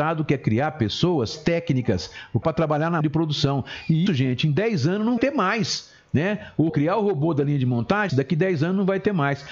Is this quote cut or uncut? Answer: cut